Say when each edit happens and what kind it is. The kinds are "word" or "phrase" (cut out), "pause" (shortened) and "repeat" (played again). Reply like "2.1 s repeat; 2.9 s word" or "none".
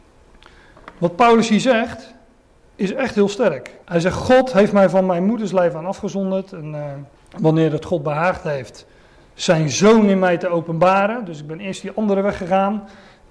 3.8 s pause; 7.1 s pause